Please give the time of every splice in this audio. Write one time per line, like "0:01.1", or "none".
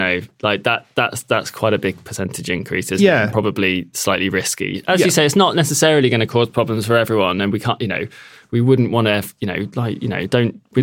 none